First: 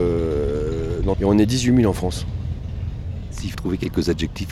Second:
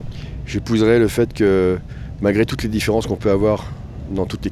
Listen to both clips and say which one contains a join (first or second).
first